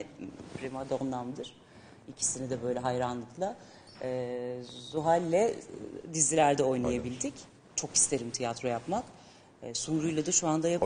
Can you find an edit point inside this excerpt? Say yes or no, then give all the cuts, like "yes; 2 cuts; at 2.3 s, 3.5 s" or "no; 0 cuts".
no; 0 cuts